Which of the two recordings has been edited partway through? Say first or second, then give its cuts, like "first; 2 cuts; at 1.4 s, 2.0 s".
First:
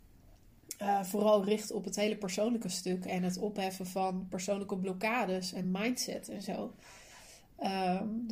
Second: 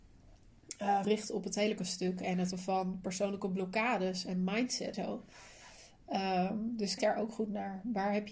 second; 5 cuts; at 1.0 s, 1.8 s, 2.5 s, 4.9 s, 7.0 s